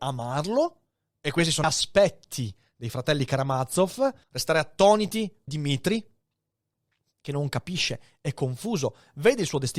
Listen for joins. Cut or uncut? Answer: cut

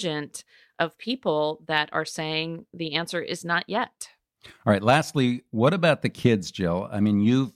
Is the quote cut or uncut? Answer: uncut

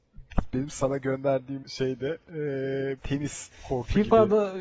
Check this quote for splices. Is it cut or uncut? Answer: cut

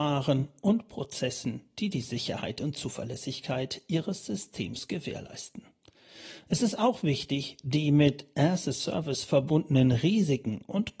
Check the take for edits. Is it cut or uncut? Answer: uncut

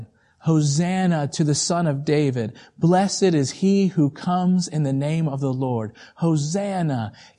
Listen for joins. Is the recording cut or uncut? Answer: uncut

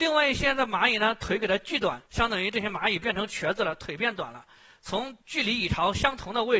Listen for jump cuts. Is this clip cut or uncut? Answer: cut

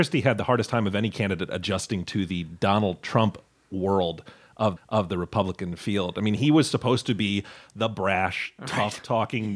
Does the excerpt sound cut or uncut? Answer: cut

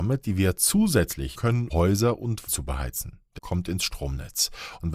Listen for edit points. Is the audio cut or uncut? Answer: cut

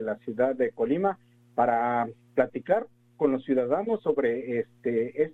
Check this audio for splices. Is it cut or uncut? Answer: uncut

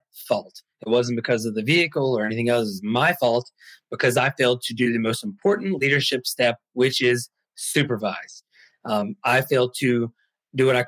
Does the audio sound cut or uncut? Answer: uncut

